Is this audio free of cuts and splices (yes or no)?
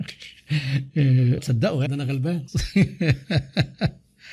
no